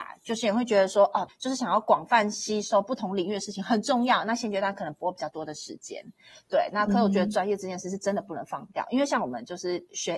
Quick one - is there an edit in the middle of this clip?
no; 0 cuts

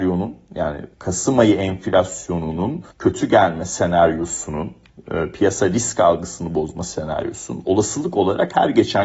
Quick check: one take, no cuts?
no; 2 cuts; at 0.9 s, 2.9 s

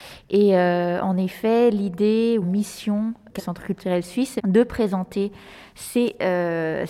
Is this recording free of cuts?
no; 3 cuts; at 2.4 s, 3.4 s, 4.4 s

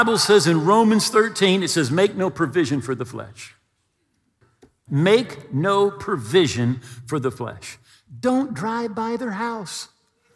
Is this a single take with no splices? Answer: yes; 0 cuts

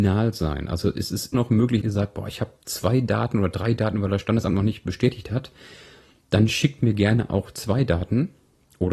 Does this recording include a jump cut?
yes; 2 cuts; at 1.3 s, 1.8 s

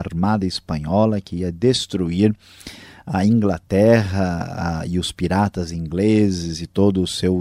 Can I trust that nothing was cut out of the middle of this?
yes; 0 cuts

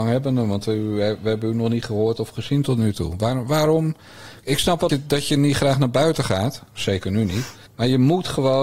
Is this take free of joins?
no; 2 cuts; at 4.9 s, 7.7 s

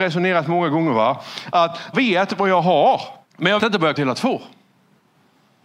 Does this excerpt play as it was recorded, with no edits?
no; 4 cuts; at 1.9 s, 3.2 s, 3.6 s, 4.0 s

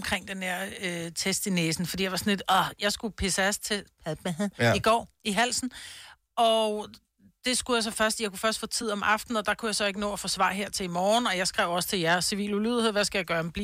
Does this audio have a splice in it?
no; 0 cuts

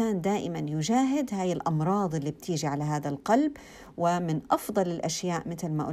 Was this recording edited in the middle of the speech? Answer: no; 0 cuts

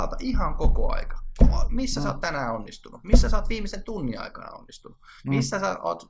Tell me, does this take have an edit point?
no; 0 cuts

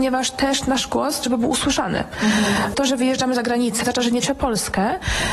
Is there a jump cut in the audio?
yes; 4 cuts; at 1.2 s, 2.7 s, 3.8 s, 4.2 s

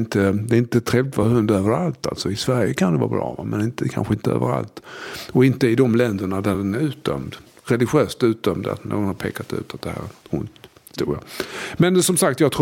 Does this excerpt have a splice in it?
no; 0 cuts

